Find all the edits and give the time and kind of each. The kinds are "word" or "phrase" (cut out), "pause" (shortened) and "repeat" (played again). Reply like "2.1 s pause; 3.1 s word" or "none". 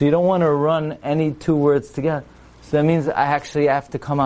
none